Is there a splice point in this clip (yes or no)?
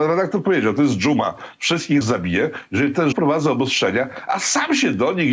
yes